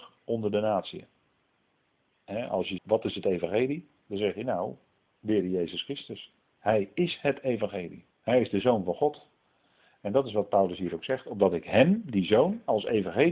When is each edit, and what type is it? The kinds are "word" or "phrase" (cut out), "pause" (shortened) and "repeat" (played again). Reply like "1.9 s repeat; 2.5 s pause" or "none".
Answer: 2.8 s phrase; 8.1 s pause